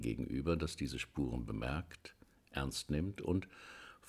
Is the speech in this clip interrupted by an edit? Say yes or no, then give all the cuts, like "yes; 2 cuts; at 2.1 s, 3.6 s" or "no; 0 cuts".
no; 0 cuts